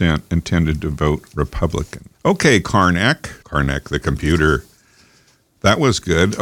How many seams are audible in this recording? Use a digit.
2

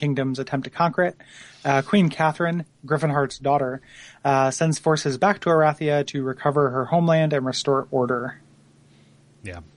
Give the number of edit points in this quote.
0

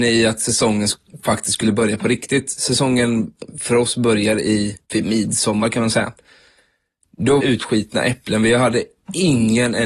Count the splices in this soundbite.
2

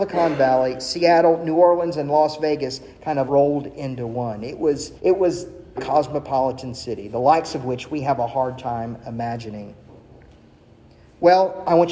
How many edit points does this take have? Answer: 3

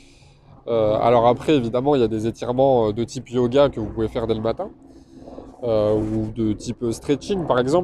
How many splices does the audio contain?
0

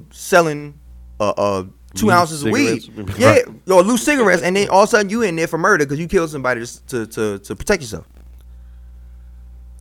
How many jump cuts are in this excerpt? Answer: 0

